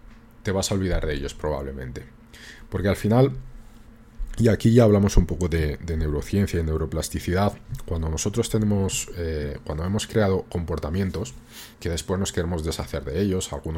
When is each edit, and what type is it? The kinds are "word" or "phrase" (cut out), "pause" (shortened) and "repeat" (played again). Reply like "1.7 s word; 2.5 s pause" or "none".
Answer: 11.7 s pause

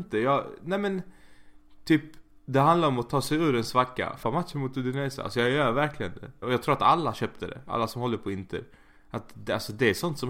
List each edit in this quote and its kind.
4.2 s phrase; 6.4 s word

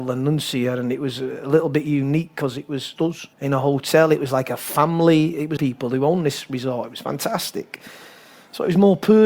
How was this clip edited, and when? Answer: 3.0 s word; 3.3 s pause; 5.6 s word

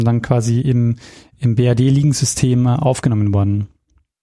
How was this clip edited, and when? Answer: none

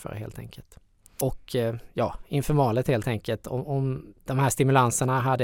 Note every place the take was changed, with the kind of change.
4.2 s pause

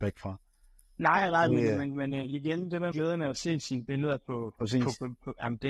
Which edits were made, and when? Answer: 2.9 s word

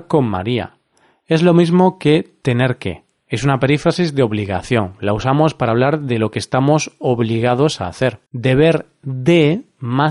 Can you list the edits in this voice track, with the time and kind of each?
8.3 s pause

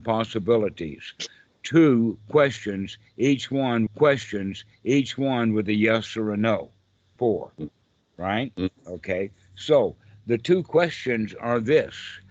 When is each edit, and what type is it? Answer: 3.9 s repeat; 7.2 s word; 8.8 s pause

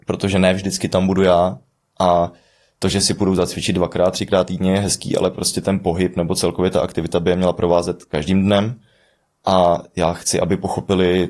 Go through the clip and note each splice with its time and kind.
none

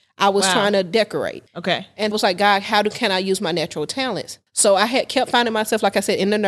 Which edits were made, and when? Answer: 1.5 s pause; 2.1 s phrase; 4.5 s pause

